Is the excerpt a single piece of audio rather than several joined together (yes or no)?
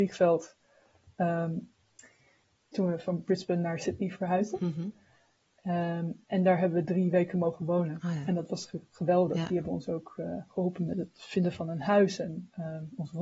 yes